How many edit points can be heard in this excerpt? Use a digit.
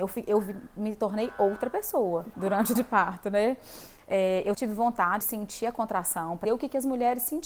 5